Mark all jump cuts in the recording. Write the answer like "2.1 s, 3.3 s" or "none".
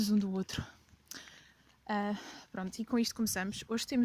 none